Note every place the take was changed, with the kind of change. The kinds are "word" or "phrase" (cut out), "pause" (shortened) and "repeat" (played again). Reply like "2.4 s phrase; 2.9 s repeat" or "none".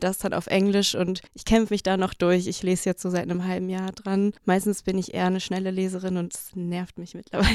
1.3 s pause; 4.4 s pause